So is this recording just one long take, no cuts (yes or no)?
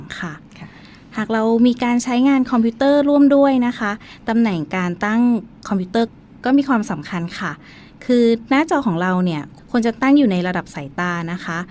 yes